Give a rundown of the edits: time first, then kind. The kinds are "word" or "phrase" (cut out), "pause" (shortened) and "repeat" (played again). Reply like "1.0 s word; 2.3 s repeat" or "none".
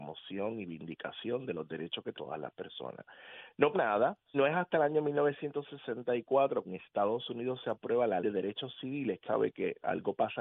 2.1 s word; 3.7 s word; 4.3 s word; 6.6 s word; 8.2 s word; 9.2 s word